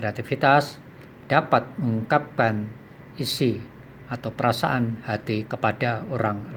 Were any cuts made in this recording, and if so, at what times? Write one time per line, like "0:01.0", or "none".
0:05.5